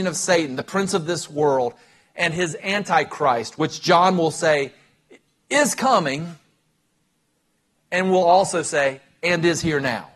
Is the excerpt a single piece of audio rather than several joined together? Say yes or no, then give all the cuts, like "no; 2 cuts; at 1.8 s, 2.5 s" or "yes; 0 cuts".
yes; 0 cuts